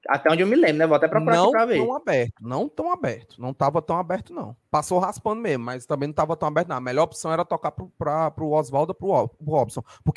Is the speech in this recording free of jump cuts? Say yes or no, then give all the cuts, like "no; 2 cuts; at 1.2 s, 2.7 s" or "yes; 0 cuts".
yes; 0 cuts